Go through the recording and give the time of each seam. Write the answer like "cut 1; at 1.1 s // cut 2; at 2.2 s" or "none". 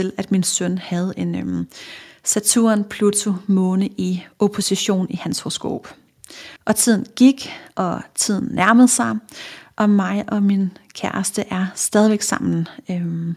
cut 1; at 6.6 s